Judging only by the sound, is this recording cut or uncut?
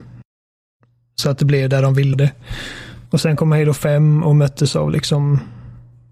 cut